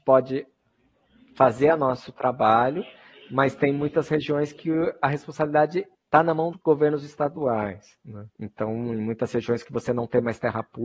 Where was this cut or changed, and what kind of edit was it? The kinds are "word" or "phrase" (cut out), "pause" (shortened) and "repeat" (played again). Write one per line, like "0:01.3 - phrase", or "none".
0:05.9 - pause
0:06.5 - word
0:08.3 - pause